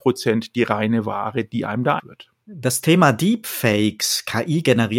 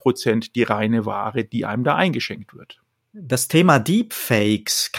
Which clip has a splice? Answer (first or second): first